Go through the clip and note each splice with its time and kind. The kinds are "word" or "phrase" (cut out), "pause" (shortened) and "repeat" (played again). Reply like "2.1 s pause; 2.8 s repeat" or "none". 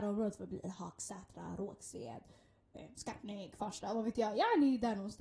none